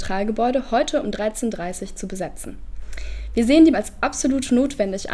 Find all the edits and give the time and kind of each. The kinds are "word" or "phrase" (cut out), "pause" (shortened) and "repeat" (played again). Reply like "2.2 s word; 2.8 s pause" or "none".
3.7 s word